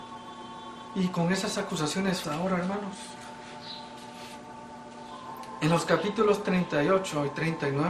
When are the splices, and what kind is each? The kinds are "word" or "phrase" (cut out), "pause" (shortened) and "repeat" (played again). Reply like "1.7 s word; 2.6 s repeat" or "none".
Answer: 2.2 s word